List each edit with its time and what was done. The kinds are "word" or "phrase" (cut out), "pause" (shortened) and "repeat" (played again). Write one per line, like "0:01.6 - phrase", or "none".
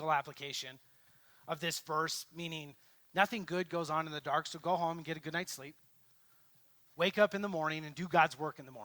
none

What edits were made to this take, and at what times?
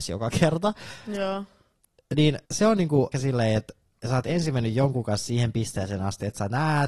0:02.5 - pause
0:03.1 - word

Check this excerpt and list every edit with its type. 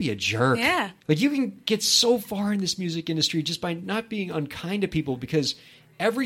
0:01.0 - pause

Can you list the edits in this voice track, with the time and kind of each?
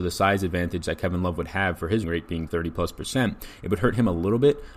0:02.0 - word
0:02.5 - phrase

